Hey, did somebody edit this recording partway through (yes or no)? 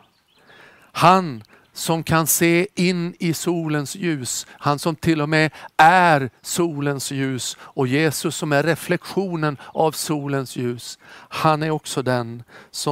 no